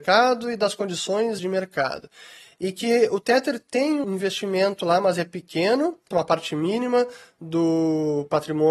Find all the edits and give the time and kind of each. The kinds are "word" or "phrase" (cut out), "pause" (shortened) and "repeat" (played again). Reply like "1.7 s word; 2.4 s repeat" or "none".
1.4 s word; 4.0 s word; 6.1 s word